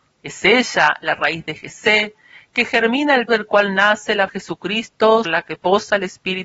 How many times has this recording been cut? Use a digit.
3